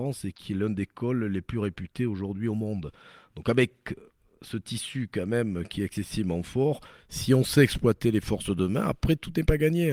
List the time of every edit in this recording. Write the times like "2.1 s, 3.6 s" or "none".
none